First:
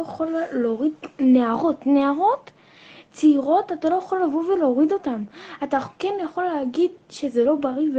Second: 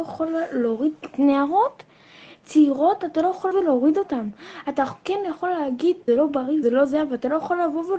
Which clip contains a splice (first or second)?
second